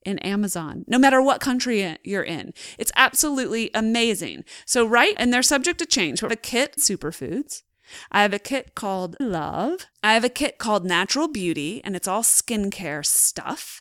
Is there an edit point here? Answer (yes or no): yes